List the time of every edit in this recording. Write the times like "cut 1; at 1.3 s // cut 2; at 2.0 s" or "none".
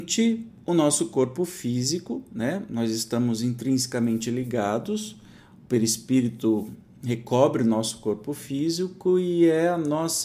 none